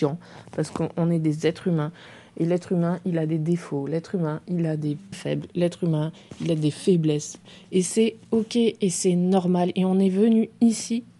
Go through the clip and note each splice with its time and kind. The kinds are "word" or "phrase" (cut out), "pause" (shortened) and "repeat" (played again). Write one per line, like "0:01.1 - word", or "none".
0:05.1 - word